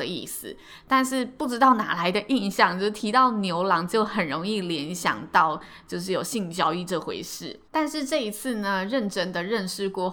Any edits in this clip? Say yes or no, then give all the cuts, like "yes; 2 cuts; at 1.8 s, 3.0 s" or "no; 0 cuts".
yes; 1 cut; at 7.7 s